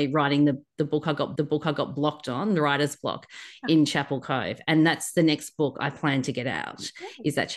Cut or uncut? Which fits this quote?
cut